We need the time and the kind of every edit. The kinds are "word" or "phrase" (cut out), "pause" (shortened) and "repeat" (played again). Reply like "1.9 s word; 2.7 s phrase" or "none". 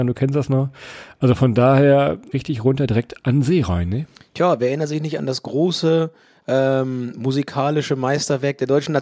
2.3 s phrase